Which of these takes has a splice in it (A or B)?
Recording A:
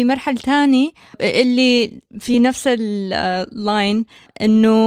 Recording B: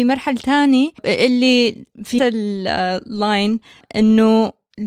B